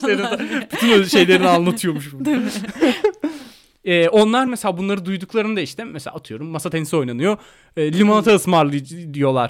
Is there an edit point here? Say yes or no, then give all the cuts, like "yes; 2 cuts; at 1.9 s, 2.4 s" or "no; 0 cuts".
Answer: no; 0 cuts